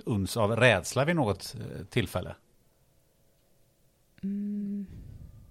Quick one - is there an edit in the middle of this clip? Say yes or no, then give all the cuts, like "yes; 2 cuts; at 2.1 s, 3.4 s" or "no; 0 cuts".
no; 0 cuts